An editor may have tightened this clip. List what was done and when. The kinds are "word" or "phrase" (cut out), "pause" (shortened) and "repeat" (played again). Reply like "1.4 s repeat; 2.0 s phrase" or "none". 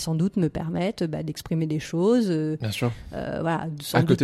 none